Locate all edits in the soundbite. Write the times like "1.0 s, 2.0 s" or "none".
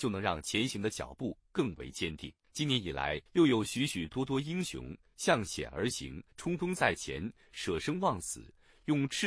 2.4 s, 3.3 s, 6.3 s